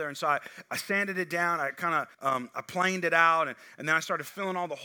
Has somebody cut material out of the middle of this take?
yes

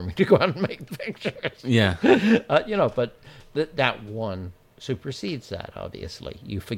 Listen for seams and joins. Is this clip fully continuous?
yes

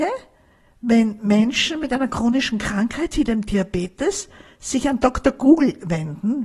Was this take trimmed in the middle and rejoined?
no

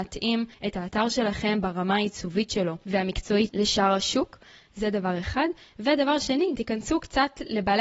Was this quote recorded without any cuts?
no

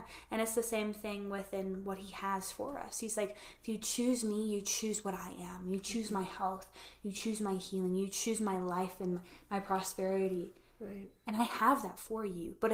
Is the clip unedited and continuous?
yes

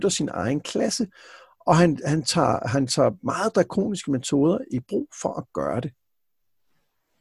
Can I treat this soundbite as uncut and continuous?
yes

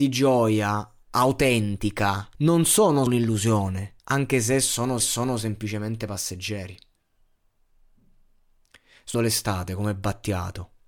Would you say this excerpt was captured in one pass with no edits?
no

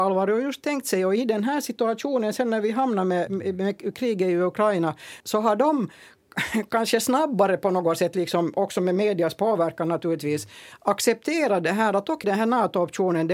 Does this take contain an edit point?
yes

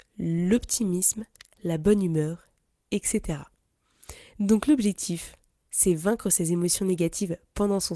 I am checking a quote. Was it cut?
no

